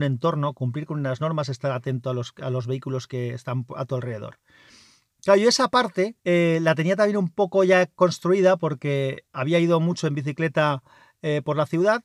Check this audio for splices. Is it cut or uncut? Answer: cut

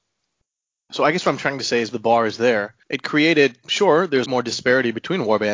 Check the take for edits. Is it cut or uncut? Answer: cut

